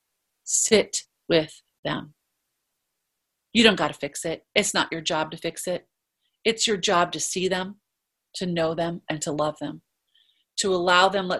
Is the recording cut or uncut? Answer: uncut